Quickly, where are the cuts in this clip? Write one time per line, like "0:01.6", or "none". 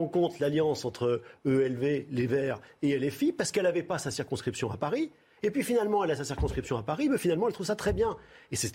none